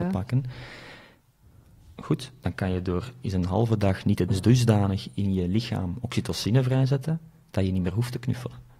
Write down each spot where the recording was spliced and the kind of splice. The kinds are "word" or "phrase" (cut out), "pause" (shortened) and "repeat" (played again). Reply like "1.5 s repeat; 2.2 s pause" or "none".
3.2 s word; 4.3 s word

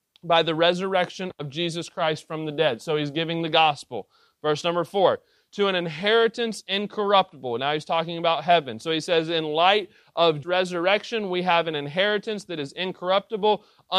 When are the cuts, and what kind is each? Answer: 10.4 s word

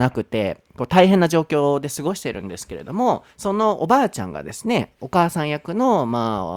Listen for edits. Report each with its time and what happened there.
3.3 s pause

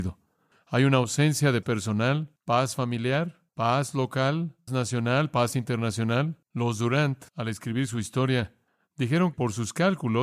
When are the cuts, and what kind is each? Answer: 1.6 s word; 2.4 s pause; 3.5 s pause; 4.7 s word; 6.4 s pause; 7.3 s pause; 9.3 s word

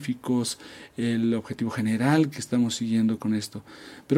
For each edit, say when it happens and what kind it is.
3.2 s word

